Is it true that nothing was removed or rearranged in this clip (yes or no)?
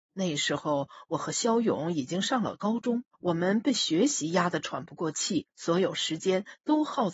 no